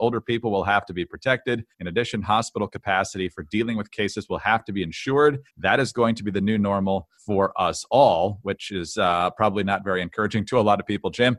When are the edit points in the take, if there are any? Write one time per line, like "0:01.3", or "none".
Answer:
0:01.7
0:05.5
0:07.2